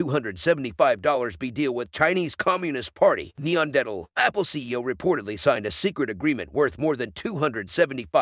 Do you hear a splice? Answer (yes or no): no